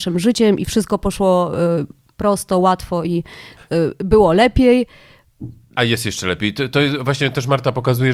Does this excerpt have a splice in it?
no; 0 cuts

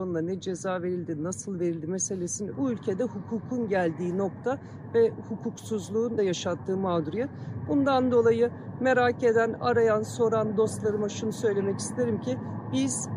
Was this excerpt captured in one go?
no; 2 cuts; at 2.5 s, 6.2 s

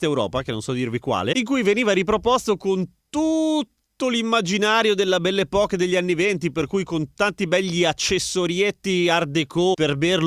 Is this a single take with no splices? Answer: yes; 0 cuts

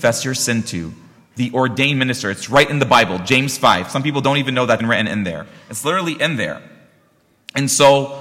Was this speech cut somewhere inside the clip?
yes; 1 cut; at 4.8 s

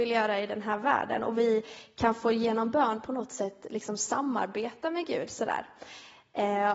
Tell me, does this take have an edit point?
no; 0 cuts

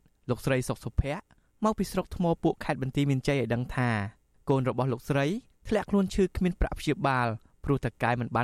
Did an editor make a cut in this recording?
no; 0 cuts

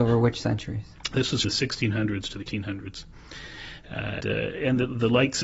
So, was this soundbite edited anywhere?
yes; 3 cuts; at 1.4 s, 2.4 s, 4.2 s

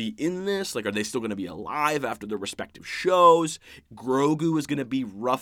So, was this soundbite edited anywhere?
no; 0 cuts

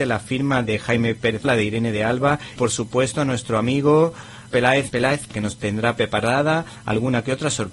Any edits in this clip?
yes; 5 cuts; at 1.4 s, 2.6 s, 4.5 s, 4.9 s, 5.3 s

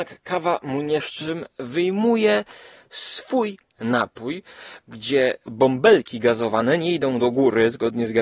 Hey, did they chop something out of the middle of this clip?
yes; 2 cuts; at 1.0 s, 3.7 s

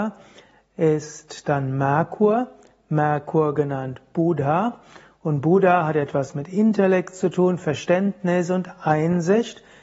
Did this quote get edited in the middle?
no; 0 cuts

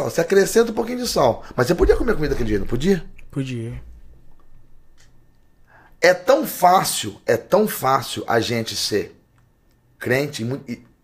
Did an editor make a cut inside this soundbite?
no; 0 cuts

